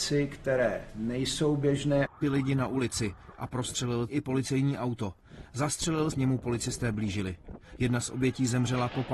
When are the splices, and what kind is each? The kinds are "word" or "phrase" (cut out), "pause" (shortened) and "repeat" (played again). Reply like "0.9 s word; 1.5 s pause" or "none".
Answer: 2.2 s phrase; 4.1 s word; 6.1 s phrase